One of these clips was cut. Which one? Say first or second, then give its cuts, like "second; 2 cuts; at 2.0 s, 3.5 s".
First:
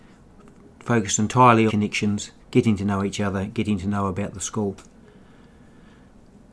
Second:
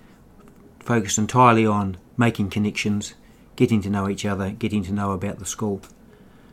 first; 2 cuts; at 1.7 s, 2.4 s